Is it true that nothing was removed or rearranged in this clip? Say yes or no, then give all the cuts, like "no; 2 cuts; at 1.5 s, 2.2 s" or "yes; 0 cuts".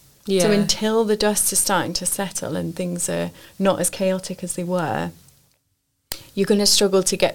yes; 0 cuts